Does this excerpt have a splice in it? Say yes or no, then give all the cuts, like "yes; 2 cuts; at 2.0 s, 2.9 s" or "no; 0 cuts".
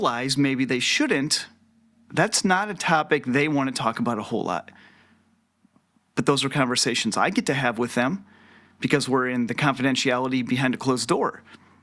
no; 0 cuts